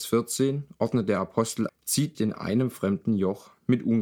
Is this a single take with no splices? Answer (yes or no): no